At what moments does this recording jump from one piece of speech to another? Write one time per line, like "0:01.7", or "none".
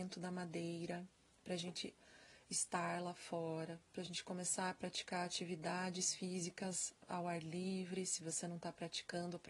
none